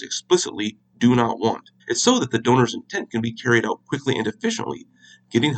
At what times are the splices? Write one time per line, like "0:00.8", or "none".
0:01.8